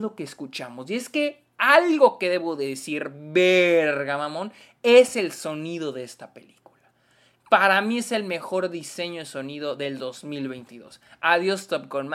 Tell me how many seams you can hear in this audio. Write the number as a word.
zero